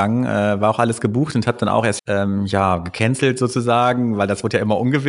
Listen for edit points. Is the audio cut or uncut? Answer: cut